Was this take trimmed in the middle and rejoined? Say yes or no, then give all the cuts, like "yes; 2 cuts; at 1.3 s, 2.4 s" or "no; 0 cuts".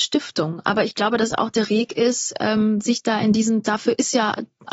yes; 1 cut; at 1.7 s